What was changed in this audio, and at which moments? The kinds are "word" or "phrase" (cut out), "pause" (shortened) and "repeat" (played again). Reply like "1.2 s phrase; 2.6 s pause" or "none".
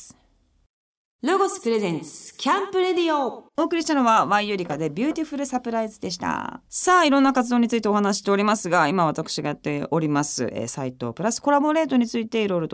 3.5 s pause; 6.7 s pause